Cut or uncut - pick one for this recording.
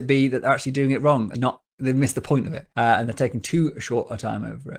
cut